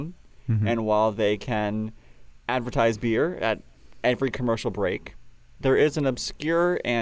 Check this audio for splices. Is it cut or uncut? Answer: uncut